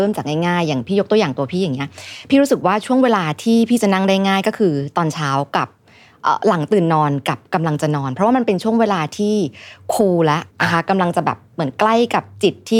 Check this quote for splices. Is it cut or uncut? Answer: cut